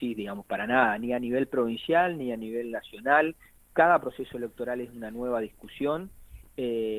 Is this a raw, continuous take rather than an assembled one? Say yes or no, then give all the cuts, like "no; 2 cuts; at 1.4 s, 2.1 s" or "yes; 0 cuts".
yes; 0 cuts